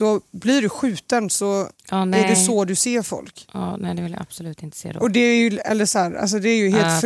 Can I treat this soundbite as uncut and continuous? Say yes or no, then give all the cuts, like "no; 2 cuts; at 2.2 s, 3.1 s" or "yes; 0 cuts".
yes; 0 cuts